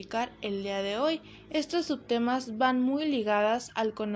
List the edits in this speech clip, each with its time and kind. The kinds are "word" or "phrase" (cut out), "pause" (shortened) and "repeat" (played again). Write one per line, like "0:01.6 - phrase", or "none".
none